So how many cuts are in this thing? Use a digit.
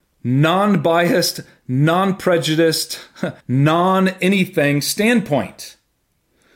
1